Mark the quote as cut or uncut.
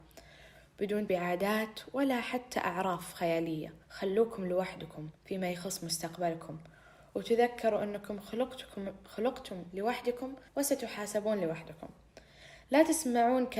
cut